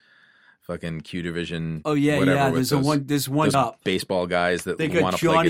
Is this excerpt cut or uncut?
cut